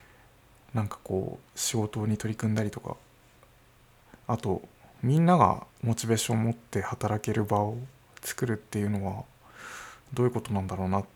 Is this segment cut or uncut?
cut